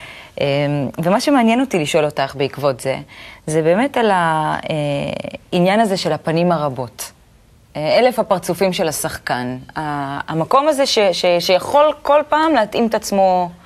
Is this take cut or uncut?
uncut